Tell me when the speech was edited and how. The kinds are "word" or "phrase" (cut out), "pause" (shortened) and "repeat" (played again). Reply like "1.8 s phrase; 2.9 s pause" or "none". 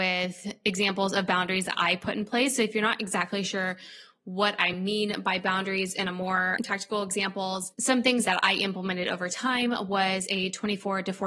none